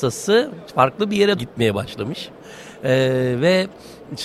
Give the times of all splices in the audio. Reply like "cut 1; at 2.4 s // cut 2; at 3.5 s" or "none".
cut 1; at 1.4 s